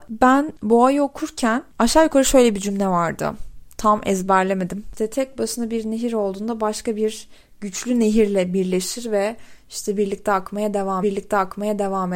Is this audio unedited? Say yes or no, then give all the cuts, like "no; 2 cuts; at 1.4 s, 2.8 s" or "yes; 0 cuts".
no; 1 cut; at 11.0 s